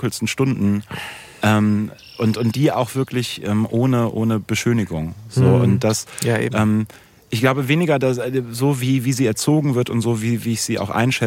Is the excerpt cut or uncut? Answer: uncut